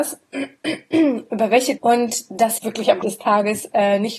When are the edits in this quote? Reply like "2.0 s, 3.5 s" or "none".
1.8 s, 2.6 s, 3.0 s